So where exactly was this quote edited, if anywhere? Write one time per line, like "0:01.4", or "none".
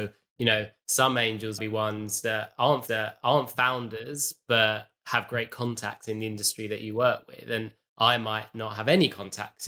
0:01.6
0:02.9